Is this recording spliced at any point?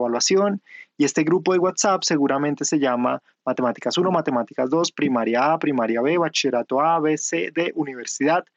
no; 0 cuts

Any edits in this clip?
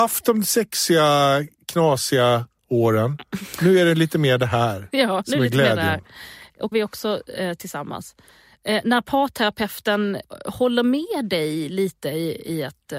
yes; 1 cut; at 6.7 s

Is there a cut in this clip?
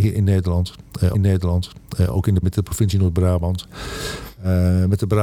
yes; 2 cuts; at 1.1 s, 2.4 s

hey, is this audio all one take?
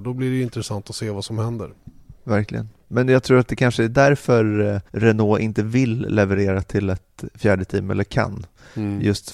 no; 1 cut; at 4.9 s

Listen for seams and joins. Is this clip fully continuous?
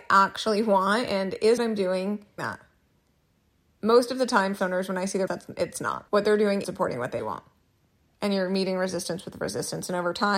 no; 7 cuts; at 1.6 s, 2.4 s, 4.6 s, 5.3 s, 6.1 s, 6.6 s, 7.2 s

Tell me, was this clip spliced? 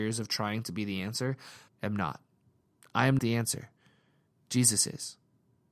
yes; 2 cuts; at 1.7 s, 3.2 s

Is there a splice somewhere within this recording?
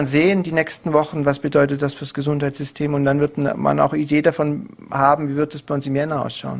no; 0 cuts

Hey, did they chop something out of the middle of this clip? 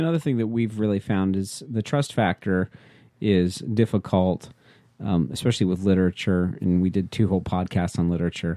no; 0 cuts

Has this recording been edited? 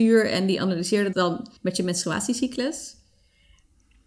yes; 2 cuts; at 1.1 s, 1.6 s

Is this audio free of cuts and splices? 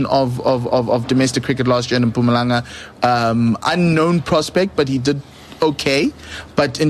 yes; 0 cuts

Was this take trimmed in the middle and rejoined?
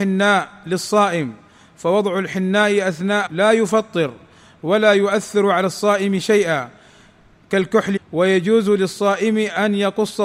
yes; 2 cuts; at 3.3 s, 8.0 s

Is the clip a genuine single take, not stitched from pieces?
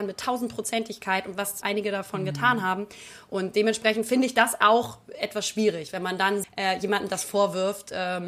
no; 2 cuts; at 1.6 s, 6.4 s

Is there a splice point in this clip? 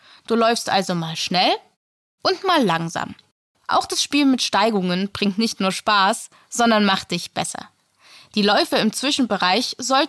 no; 0 cuts

